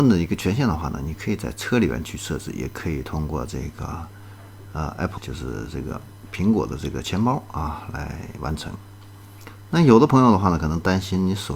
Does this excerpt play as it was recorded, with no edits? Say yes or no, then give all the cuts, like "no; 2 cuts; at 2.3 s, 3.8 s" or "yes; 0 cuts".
no; 1 cut; at 5.2 s